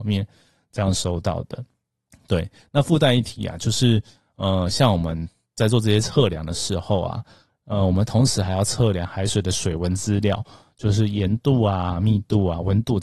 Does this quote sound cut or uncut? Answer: uncut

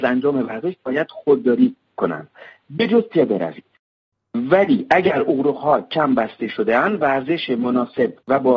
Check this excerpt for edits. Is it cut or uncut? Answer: uncut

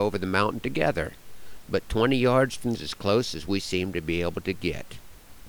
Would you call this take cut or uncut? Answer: cut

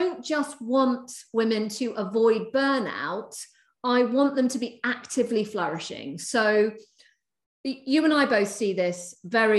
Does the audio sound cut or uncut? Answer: uncut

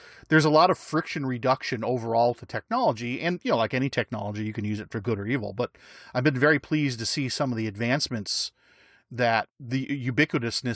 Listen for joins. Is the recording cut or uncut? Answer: uncut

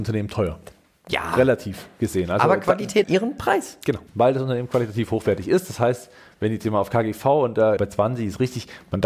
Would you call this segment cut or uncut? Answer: cut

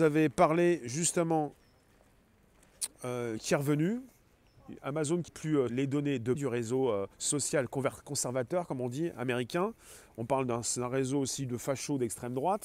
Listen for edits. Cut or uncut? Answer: cut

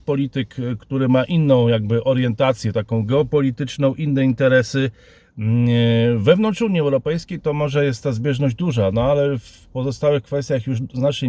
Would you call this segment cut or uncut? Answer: uncut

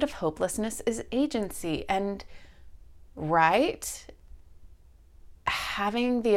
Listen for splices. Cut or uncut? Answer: cut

